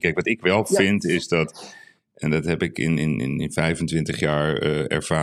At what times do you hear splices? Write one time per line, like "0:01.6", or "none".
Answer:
none